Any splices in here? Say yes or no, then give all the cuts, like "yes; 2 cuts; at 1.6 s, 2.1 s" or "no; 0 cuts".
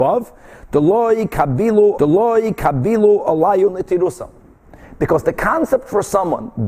yes; 1 cut; at 2.0 s